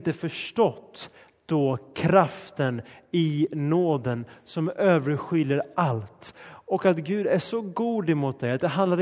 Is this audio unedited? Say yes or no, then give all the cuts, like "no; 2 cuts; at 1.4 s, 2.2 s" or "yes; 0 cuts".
yes; 0 cuts